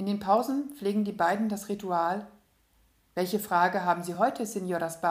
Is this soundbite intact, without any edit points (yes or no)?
yes